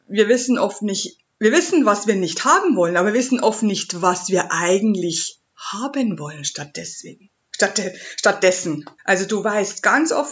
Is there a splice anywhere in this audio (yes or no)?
yes